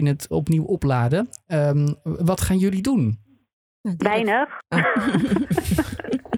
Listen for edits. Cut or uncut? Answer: uncut